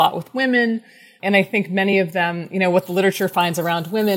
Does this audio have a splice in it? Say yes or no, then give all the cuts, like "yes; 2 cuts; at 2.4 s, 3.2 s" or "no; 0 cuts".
no; 0 cuts